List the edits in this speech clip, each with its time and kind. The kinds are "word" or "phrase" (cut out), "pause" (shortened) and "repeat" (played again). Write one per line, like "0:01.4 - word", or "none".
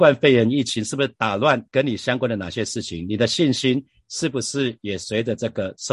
0:01.7 - pause

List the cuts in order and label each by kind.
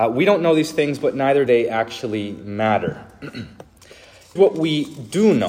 0:01.5 - word
0:04.4 - word

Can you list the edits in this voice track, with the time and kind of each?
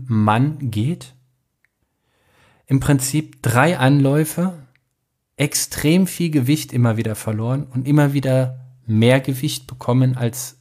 none

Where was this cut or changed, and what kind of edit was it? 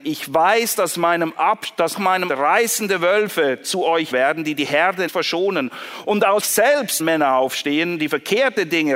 0:01.9 - word
0:02.3 - word
0:04.1 - word
0:05.1 - word
0:06.4 - word
0:07.0 - word

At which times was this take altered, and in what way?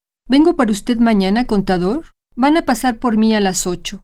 0:02.2 - pause

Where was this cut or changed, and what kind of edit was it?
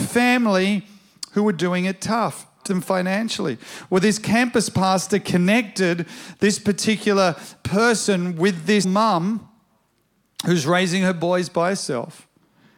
0:02.7 - word
0:08.8 - word

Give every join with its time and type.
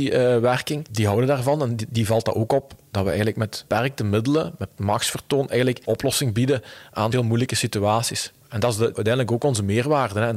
0:04.8 - word
0:05.9 - phrase
0:07.1 - word

